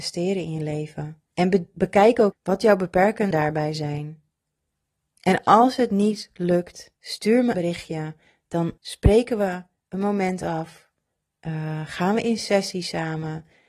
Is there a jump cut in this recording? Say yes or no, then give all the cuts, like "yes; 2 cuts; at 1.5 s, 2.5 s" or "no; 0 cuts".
yes; 7 cuts; at 1.3 s, 2.3 s, 3.3 s, 4.7 s, 7.0 s, 7.5 s, 8.8 s